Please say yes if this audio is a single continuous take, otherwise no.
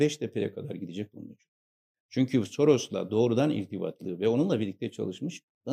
yes